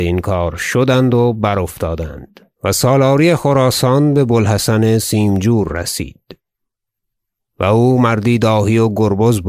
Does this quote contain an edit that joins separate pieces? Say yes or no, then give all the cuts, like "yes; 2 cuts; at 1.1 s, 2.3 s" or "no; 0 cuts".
yes; 1 cut; at 2.5 s